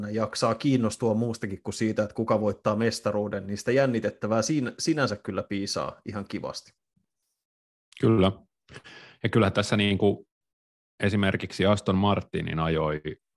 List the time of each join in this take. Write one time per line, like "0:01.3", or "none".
none